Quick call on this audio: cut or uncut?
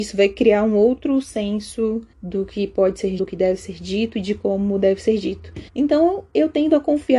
cut